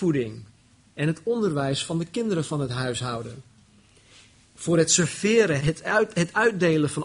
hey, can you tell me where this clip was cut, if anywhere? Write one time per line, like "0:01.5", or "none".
0:05.6